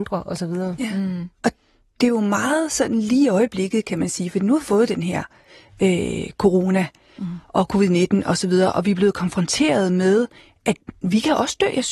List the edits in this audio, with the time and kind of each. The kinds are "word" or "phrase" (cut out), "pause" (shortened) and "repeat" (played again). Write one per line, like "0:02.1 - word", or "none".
none

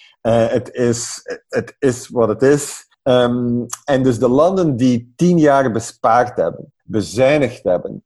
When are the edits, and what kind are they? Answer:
0:02.9 - pause
0:06.8 - pause

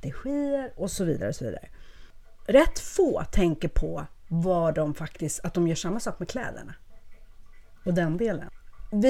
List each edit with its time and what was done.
none

